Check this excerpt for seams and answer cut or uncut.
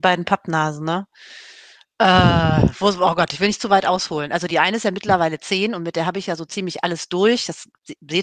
uncut